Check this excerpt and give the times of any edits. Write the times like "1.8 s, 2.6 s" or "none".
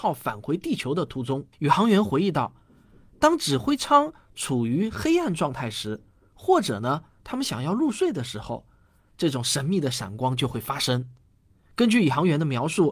1.5 s